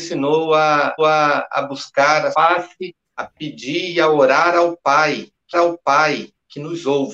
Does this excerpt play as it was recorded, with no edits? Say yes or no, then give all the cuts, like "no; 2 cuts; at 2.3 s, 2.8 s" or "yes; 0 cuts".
no; 4 cuts; at 1.0 s, 2.3 s, 3.0 s, 5.5 s